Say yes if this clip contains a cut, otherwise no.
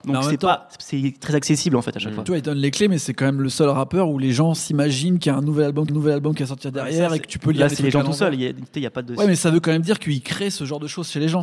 yes